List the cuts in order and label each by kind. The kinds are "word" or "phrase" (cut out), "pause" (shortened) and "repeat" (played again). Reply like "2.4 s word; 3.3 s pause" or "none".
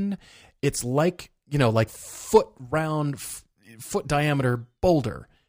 1.9 s phrase